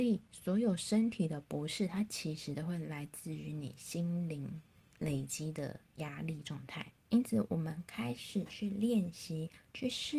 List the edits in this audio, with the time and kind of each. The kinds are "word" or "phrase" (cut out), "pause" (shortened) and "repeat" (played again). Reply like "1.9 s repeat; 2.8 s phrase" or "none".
7.0 s pause